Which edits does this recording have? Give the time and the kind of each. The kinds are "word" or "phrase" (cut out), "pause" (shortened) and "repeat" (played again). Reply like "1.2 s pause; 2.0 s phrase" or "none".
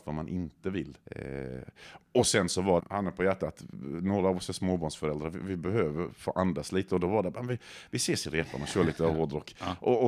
1.1 s pause; 2.8 s phrase